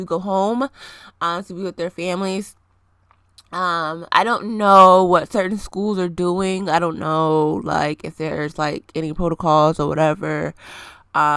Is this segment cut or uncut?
uncut